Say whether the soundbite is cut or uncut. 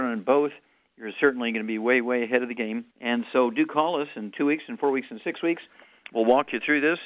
cut